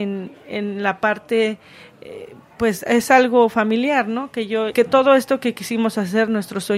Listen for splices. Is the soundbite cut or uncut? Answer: cut